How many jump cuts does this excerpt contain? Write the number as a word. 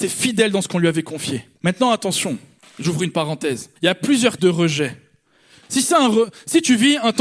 four